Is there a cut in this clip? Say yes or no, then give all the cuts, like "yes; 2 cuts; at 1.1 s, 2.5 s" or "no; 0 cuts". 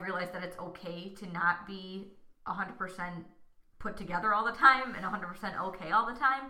yes; 1 cut; at 2.4 s